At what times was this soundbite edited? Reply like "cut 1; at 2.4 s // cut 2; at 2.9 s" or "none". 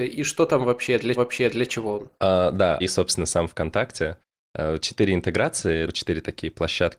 cut 1; at 1.2 s // cut 2; at 2.2 s // cut 3; at 2.8 s // cut 4; at 5.8 s